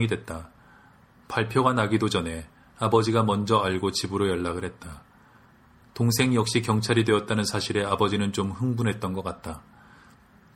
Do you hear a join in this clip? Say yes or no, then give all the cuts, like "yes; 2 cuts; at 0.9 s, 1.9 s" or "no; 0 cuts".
no; 0 cuts